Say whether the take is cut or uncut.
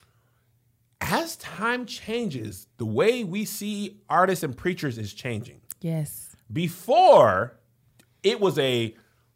uncut